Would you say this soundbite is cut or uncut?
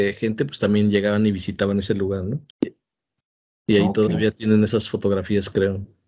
cut